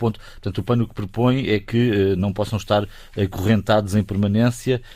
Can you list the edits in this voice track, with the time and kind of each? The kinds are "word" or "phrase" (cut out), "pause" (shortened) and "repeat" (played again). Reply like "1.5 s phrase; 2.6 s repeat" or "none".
none